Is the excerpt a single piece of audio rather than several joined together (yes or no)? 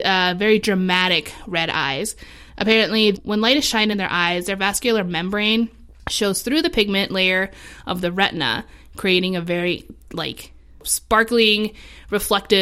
yes